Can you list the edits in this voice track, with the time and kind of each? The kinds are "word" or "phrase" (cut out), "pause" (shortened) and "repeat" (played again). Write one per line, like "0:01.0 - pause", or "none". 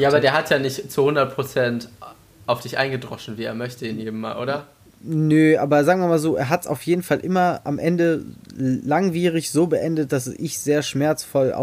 none